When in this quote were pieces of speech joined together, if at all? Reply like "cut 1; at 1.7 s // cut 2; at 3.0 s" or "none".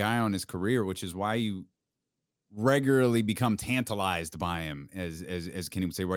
none